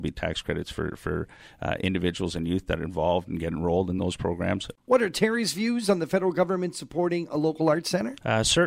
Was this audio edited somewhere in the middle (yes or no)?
no